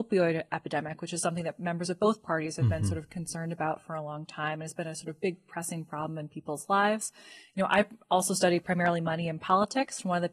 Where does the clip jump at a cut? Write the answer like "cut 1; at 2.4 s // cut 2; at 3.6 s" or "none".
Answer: none